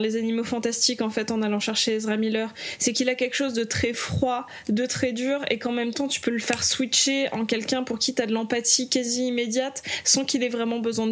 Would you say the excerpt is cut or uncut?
uncut